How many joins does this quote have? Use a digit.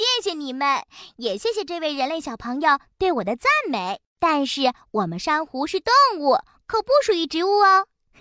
1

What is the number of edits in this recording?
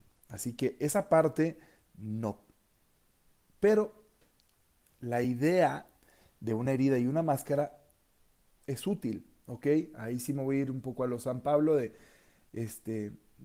0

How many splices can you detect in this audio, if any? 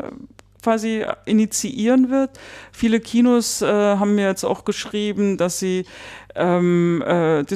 0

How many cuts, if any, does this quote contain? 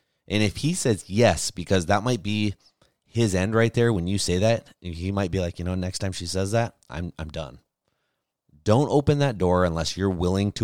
0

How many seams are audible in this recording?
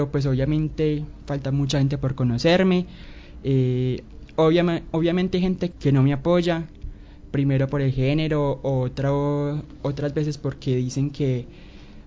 1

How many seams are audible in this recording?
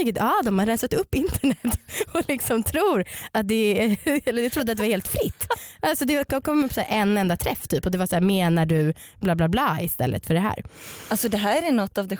0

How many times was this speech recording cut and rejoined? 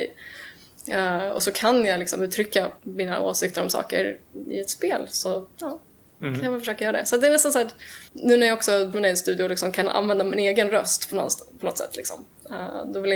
4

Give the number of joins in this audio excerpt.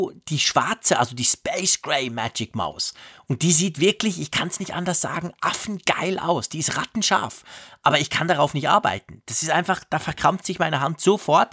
0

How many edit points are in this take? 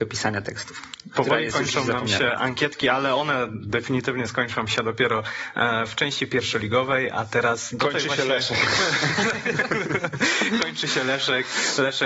0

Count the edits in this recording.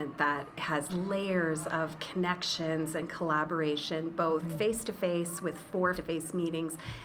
1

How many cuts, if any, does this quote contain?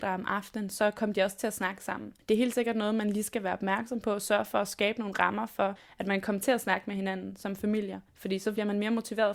2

